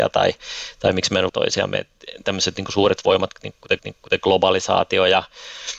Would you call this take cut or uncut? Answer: cut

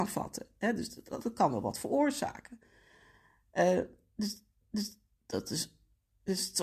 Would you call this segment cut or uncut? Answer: cut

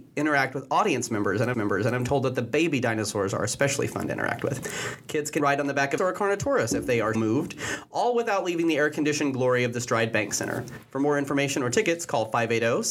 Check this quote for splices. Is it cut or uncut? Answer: cut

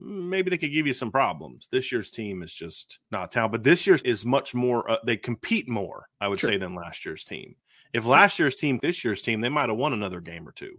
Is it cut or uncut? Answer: cut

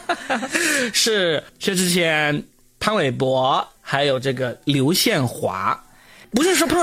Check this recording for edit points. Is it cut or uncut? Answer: cut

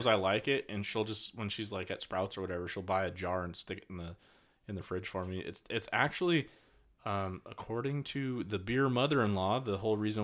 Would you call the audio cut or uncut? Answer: uncut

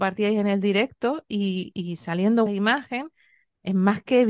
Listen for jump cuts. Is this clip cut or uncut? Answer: cut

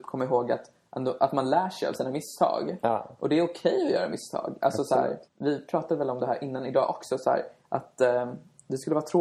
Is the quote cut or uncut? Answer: cut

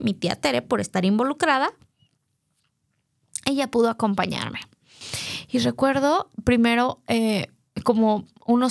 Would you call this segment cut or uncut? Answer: uncut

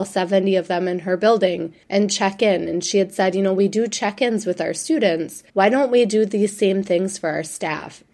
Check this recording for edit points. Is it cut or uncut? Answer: cut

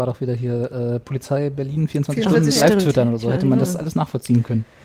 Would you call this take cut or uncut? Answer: cut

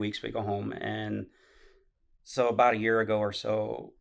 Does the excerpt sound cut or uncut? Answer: uncut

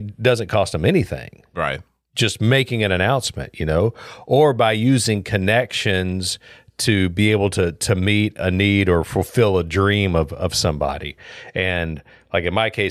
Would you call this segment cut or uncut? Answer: uncut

